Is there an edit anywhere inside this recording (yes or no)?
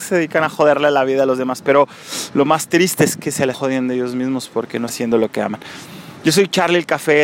yes